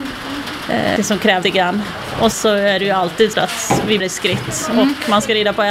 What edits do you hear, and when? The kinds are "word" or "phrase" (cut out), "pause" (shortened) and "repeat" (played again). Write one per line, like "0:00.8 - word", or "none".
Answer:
0:01.0 - word
0:01.4 - word
0:02.3 - word
0:03.3 - word
0:04.0 - word